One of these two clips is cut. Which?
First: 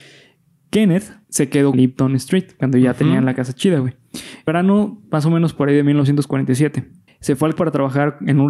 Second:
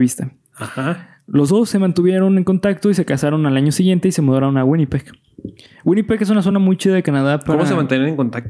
first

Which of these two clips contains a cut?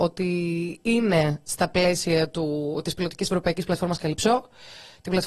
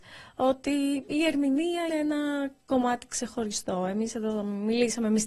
second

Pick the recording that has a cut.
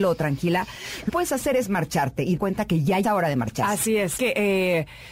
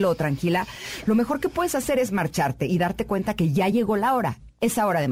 first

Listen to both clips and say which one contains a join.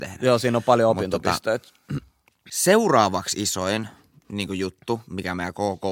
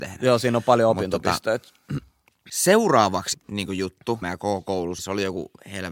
second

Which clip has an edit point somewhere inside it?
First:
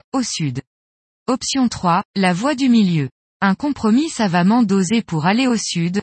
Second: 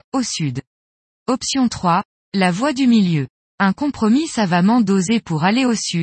first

